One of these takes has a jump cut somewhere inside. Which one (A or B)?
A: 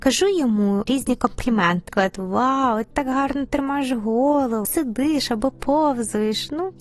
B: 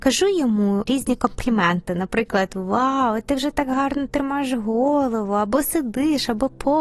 A